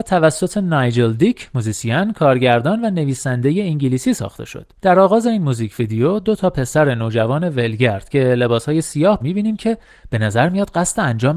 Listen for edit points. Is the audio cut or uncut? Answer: cut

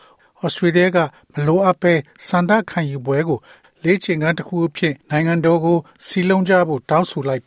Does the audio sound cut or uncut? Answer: cut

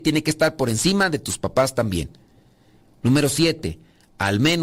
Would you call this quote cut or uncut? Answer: uncut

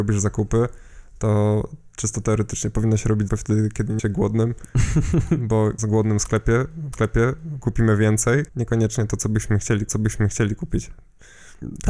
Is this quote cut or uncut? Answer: cut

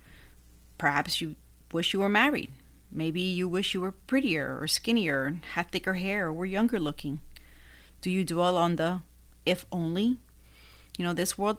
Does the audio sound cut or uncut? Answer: uncut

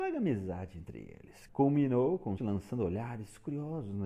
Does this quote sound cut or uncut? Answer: cut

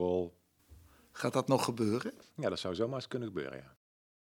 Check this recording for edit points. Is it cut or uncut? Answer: uncut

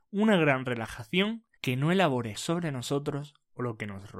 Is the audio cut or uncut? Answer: cut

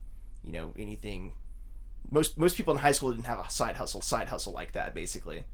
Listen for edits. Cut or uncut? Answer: cut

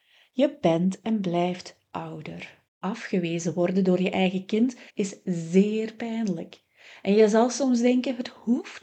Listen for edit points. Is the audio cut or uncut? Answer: cut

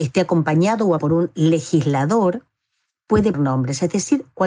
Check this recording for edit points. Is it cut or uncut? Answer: cut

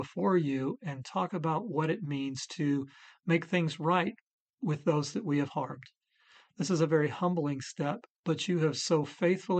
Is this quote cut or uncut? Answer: uncut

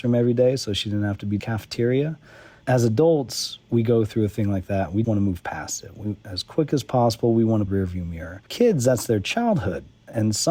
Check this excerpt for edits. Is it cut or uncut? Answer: cut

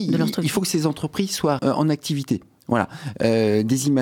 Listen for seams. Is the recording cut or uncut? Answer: cut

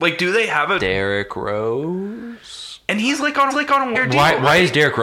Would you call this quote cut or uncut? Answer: cut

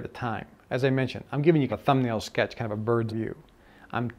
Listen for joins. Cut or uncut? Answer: cut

